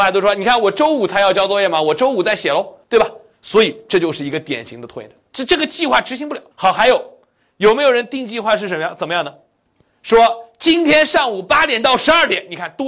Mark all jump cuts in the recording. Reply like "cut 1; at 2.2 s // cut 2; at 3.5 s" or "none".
cut 1; at 2.8 s // cut 2; at 6.5 s